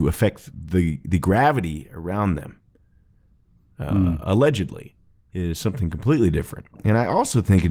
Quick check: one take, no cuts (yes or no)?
yes